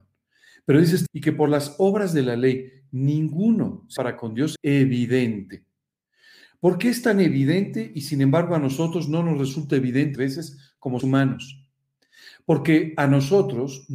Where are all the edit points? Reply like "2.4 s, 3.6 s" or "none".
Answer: 1.1 s, 4.0 s, 4.6 s, 10.2 s, 11.0 s